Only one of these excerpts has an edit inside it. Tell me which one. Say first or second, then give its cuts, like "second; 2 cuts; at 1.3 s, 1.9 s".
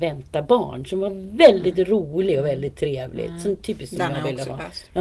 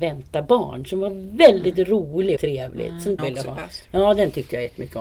second; 2 cuts; at 2.4 s, 3.2 s